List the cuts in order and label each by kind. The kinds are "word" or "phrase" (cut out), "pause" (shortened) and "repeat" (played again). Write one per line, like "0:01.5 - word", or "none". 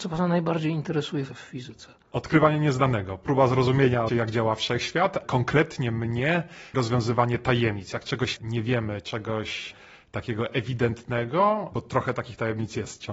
0:01.3 - word
0:04.1 - word
0:05.2 - word
0:06.7 - word
0:08.4 - word